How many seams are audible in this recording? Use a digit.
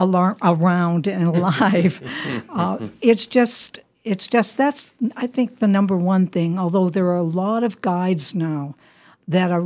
0